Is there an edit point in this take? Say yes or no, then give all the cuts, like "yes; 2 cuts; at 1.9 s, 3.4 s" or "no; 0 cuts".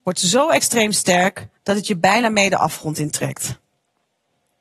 yes; 1 cut; at 1.6 s